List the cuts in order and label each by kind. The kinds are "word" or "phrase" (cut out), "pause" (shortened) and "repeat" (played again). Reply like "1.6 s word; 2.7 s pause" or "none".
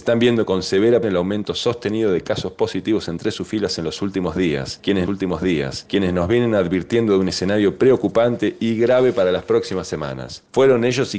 1.0 s word; 5.1 s repeat